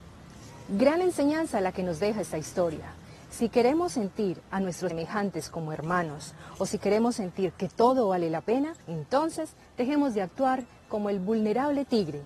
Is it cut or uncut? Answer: cut